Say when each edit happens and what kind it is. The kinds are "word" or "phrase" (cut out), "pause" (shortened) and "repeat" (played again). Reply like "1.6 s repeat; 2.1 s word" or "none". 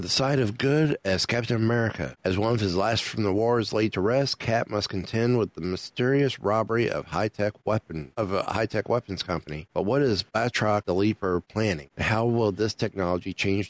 3.0 s word